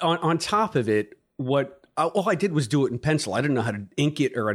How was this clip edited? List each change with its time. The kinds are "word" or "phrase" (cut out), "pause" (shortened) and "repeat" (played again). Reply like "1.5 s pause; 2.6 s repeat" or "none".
none